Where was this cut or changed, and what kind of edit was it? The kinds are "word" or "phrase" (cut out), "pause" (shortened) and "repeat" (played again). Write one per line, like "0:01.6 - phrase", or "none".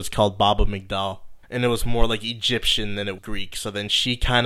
0:01.4 - pause
0:03.2 - word